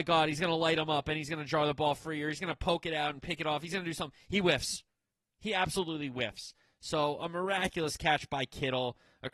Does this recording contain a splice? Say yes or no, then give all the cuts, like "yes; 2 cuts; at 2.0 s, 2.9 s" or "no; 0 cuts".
no; 0 cuts